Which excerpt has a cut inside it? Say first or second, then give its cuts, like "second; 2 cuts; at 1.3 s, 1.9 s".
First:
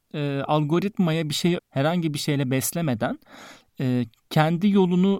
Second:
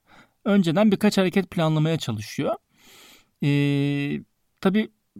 first; 1 cut; at 1.6 s